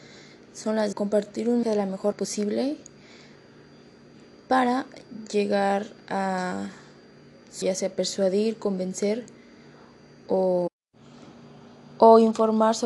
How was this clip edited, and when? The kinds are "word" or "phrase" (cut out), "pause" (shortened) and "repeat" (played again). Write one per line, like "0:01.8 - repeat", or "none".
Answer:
0:00.9 - word
0:01.6 - word
0:02.1 - word
0:07.6 - word